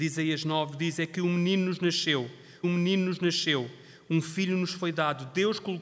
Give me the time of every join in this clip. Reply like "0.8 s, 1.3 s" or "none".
2.6 s